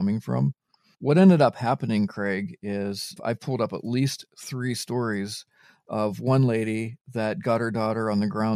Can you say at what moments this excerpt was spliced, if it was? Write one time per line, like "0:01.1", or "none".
0:00.9
0:03.2